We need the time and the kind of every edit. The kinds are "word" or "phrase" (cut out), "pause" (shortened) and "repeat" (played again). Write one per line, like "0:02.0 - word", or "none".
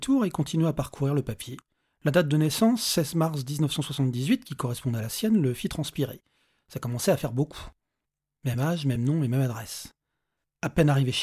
none